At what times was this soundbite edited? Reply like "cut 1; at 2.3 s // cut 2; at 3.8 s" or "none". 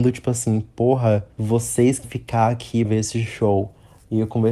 cut 1; at 1.3 s // cut 2; at 2.0 s // cut 3; at 2.8 s